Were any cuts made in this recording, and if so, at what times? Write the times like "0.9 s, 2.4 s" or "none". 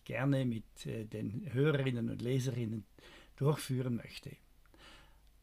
none